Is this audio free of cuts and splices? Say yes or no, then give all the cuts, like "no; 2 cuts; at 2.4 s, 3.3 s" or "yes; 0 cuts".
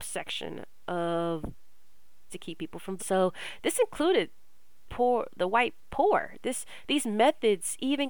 no; 3 cuts; at 2.3 s, 3.0 s, 4.9 s